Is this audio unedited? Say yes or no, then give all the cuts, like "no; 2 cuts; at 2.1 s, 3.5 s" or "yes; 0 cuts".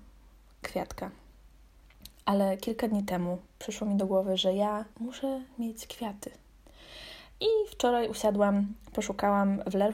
no; 1 cut; at 4.9 s